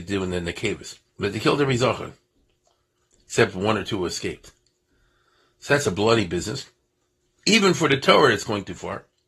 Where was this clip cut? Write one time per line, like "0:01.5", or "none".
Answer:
0:01.1